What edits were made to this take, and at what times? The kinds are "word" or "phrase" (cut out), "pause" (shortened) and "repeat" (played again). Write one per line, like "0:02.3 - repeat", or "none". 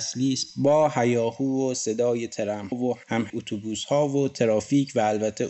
0:02.7 - word
0:03.3 - word